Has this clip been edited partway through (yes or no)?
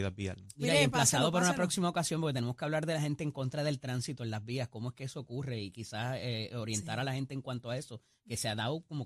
no